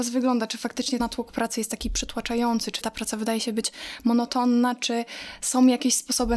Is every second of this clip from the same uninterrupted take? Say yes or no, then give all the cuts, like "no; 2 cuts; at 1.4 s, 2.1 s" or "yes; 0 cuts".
no; 2 cuts; at 1.0 s, 2.8 s